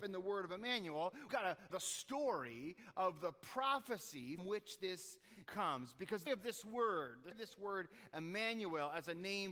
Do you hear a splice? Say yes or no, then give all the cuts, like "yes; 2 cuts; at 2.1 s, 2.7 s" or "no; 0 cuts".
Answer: yes; 6 cuts; at 1.3 s, 1.7 s, 4.4 s, 5.4 s, 6.3 s, 7.3 s